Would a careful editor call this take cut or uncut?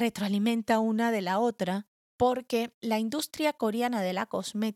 uncut